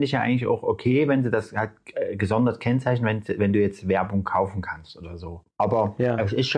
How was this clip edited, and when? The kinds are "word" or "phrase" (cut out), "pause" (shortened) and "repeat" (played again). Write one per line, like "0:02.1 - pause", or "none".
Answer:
0:05.5 - pause